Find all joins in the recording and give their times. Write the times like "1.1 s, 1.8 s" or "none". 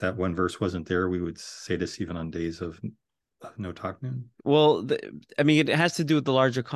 4.3 s